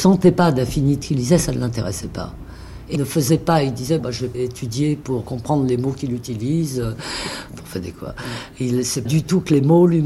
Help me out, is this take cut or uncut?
cut